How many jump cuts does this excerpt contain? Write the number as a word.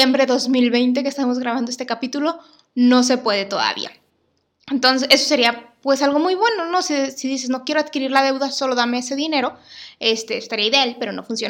zero